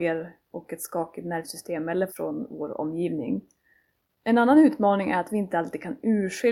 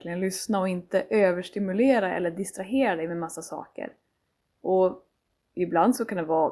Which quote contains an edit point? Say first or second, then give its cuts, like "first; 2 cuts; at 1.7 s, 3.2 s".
first; 1 cut; at 2.1 s